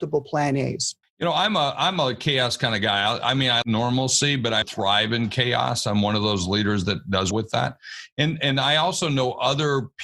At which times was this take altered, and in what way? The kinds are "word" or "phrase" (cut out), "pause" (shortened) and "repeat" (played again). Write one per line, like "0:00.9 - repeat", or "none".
0:01.0 - pause
0:03.6 - word
0:04.6 - word
0:07.3 - word